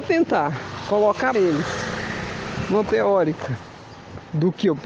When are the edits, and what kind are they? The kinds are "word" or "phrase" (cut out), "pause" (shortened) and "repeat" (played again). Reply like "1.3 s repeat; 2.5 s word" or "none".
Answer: 1.3 s word; 2.8 s word